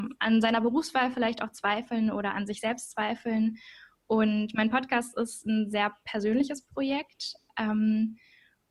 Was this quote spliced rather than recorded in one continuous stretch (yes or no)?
no